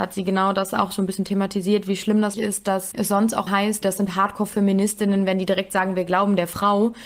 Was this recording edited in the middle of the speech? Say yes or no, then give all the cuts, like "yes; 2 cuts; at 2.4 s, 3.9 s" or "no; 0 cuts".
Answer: yes; 4 cuts; at 2.3 s, 2.9 s, 3.5 s, 3.8 s